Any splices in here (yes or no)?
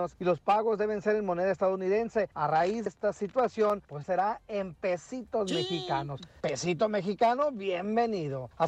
yes